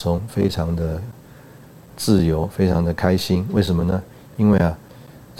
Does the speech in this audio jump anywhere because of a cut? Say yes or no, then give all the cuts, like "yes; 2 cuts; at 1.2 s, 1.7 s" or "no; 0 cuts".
no; 0 cuts